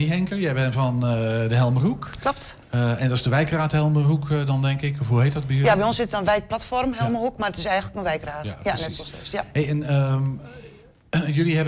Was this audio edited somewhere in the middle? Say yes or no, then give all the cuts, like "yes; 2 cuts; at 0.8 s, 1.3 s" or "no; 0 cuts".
no; 0 cuts